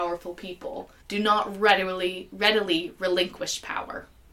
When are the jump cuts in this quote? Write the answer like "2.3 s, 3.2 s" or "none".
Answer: 1.0 s